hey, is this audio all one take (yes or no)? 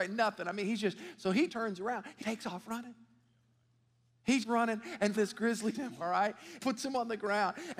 no